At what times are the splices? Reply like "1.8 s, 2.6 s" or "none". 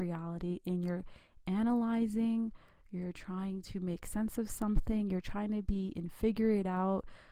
none